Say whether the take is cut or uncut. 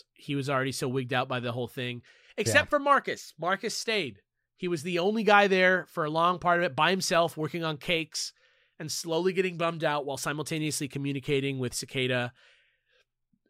uncut